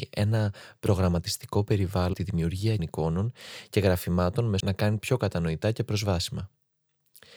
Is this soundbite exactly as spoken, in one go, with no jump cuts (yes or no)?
no